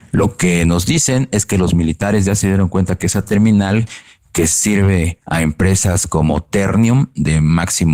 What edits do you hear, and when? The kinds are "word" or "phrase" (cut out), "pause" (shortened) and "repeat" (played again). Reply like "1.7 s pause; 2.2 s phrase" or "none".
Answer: none